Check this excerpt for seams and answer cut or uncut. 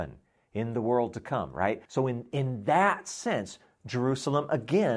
cut